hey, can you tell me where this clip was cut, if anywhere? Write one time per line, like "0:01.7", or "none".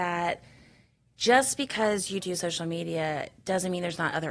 0:02.2